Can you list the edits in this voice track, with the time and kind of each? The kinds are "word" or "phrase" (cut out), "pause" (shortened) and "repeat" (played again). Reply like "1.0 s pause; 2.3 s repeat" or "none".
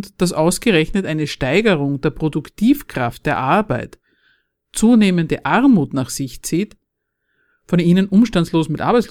none